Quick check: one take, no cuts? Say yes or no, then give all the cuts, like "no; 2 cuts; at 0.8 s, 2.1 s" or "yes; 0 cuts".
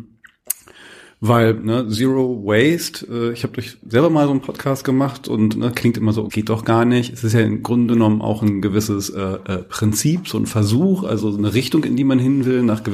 no; 1 cut; at 6.3 s